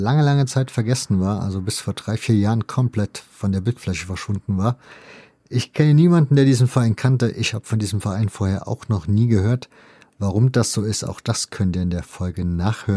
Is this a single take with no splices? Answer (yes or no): yes